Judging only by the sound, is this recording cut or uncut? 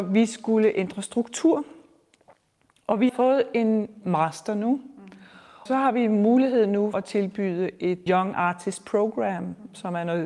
cut